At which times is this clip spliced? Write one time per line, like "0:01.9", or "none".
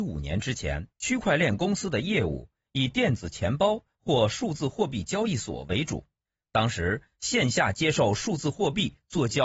0:00.9
0:06.2